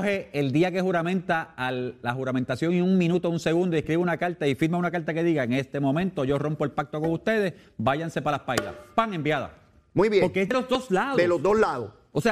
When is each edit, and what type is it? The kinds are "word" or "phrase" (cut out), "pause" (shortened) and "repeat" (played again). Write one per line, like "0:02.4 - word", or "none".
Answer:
none

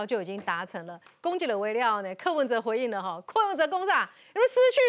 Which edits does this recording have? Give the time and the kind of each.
none

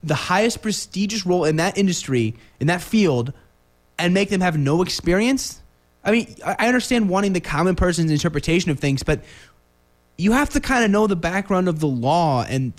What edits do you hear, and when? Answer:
none

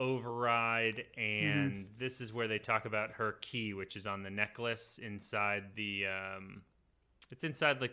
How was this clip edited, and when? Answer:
0:05.7 - word

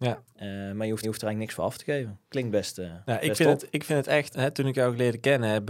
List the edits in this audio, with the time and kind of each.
0:01.0 - repeat
0:02.2 - pause
0:04.3 - word

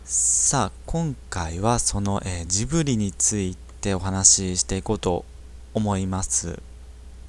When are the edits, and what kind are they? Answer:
none

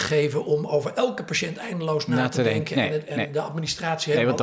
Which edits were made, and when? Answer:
none

